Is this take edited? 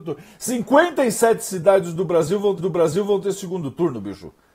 yes; 1 cut; at 2.6 s

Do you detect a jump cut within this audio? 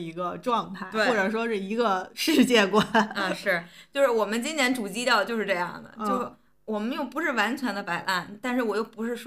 no; 0 cuts

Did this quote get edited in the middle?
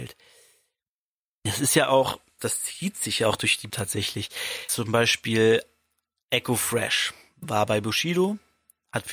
yes; 3 cuts; at 2.4 s, 3.7 s, 4.7 s

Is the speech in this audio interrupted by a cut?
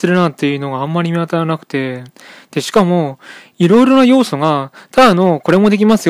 no; 0 cuts

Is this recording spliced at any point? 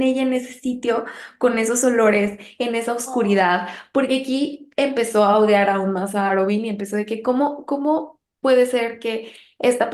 no; 0 cuts

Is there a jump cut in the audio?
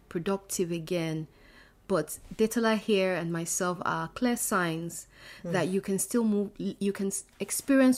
no; 0 cuts

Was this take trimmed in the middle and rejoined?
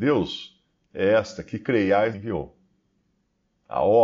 yes; 1 cut; at 2.1 s

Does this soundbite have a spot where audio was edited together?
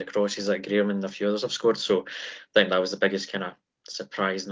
no; 0 cuts

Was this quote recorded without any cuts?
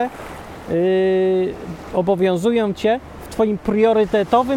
yes; 0 cuts

